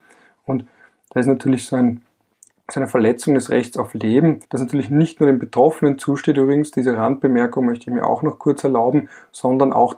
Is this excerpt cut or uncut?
cut